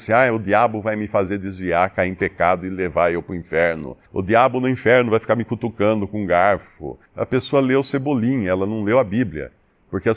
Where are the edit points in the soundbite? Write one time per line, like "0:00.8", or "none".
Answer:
0:04.1
0:07.1